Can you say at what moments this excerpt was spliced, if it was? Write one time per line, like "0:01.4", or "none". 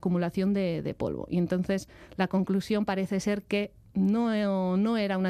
none